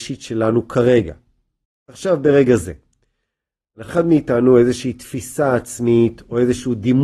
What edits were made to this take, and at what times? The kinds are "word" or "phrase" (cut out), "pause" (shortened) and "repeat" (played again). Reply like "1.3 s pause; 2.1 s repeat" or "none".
1.6 s pause; 3.9 s phrase